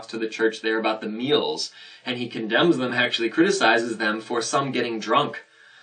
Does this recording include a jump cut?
no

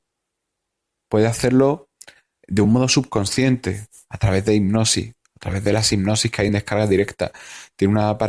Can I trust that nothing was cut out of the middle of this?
yes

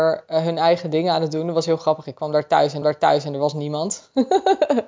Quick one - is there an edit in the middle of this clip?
yes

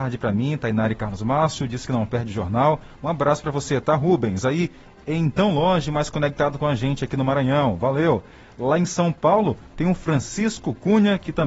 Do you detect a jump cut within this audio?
no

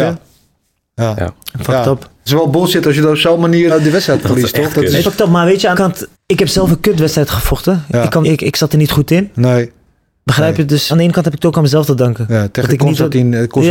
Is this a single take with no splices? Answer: no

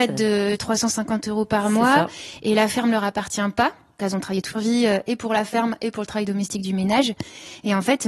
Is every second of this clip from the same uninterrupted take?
no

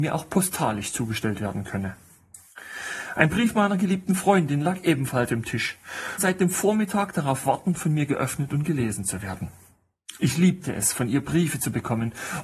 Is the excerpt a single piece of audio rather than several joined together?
no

